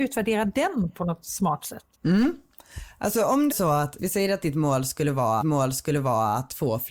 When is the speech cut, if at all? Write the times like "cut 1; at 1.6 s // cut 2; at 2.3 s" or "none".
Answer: cut 1; at 1.9 s // cut 2; at 3.5 s // cut 3; at 4.0 s // cut 4; at 5.4 s